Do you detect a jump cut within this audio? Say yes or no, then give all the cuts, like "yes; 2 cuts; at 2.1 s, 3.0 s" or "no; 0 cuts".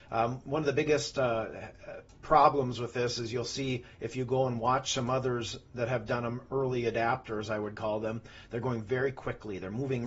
no; 0 cuts